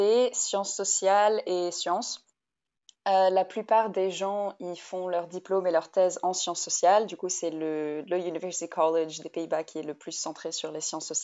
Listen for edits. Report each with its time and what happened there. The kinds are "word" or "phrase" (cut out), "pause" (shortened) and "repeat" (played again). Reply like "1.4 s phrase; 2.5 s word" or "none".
none